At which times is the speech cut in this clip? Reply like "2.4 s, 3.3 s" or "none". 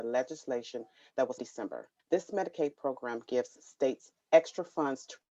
1.4 s, 2.0 s

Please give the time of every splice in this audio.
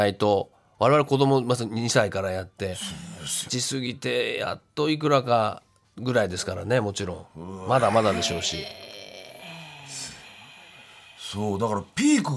3.5 s, 5.8 s

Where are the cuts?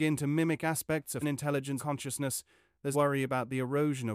1.2 s, 1.8 s, 2.9 s

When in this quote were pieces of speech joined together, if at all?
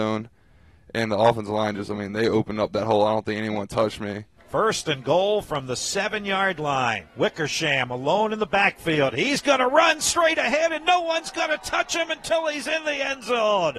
none

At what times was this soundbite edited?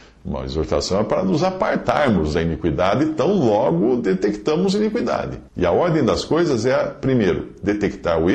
5.5 s

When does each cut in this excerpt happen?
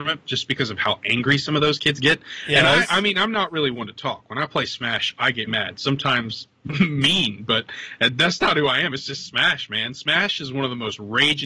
5.5 s

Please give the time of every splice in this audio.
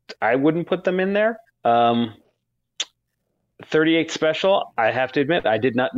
1.5 s

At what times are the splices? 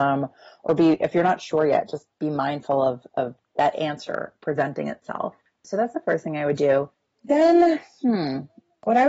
none

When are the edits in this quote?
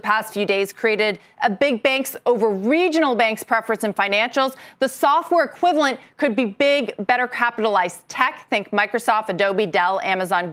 none

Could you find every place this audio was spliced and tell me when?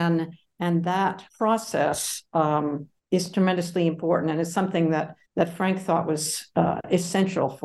1.3 s, 3.0 s, 5.2 s

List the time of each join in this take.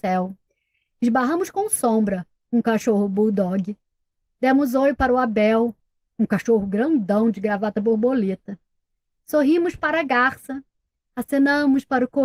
none

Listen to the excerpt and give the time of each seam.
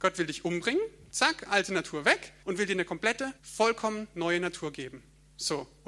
1.1 s, 2.4 s, 3.4 s

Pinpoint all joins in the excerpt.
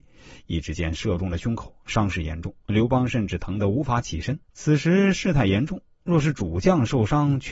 2.6 s, 4.4 s

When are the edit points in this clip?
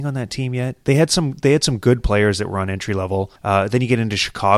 3.4 s

